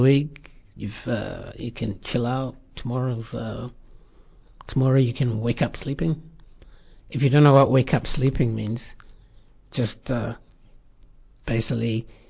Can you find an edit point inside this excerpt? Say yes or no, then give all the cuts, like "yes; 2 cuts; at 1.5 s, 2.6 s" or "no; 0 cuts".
no; 0 cuts